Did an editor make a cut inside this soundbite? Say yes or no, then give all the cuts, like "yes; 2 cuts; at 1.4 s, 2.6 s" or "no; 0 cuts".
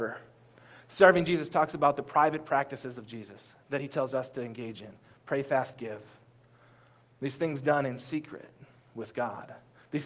no; 0 cuts